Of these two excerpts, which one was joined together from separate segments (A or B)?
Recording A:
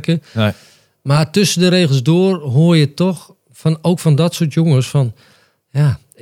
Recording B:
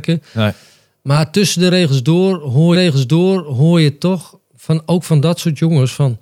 B